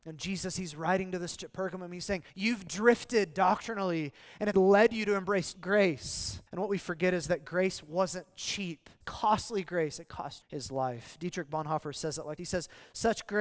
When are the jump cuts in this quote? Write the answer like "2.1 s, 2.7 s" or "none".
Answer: 1.4 s, 2.3 s, 4.5 s, 5.5 s, 6.5 s, 9.0 s, 10.4 s, 12.4 s